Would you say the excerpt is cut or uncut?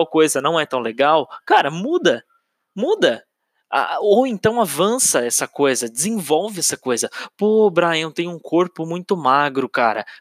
uncut